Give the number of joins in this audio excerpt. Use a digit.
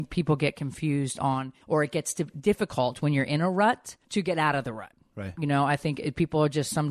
2